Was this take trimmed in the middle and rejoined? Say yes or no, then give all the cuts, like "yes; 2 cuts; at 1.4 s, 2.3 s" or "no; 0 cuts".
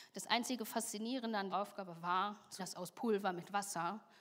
yes; 2 cuts; at 1.5 s, 2.6 s